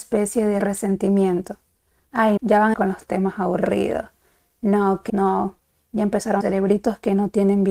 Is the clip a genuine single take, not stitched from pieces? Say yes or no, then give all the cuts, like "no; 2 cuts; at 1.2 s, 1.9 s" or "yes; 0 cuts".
no; 4 cuts; at 2.4 s, 2.7 s, 5.1 s, 6.4 s